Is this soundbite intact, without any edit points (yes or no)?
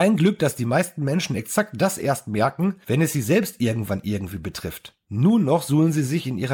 yes